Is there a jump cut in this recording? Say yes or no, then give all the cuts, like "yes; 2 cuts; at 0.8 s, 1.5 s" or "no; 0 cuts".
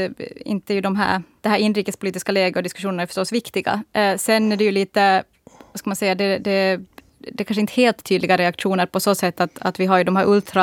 no; 0 cuts